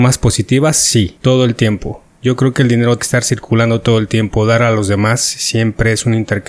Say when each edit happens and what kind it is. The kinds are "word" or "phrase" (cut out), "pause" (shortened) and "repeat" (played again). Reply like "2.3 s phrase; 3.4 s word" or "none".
3.0 s word